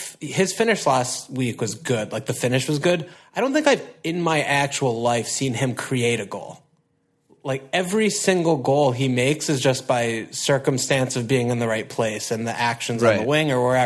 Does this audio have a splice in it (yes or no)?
no